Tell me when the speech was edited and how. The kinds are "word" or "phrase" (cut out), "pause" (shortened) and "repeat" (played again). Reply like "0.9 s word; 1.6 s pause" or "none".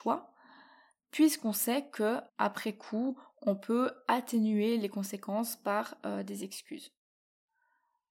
2.3 s pause